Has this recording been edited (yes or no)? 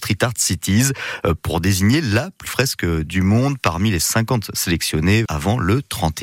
yes